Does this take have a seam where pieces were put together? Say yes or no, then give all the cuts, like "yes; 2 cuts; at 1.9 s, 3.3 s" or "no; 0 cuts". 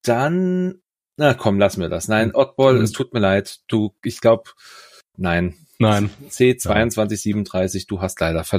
no; 0 cuts